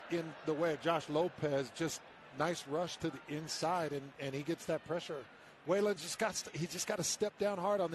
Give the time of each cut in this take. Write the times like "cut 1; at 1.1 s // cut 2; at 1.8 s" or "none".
none